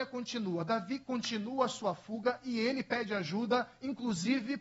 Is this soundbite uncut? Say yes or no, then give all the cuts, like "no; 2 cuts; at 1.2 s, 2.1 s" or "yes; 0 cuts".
yes; 0 cuts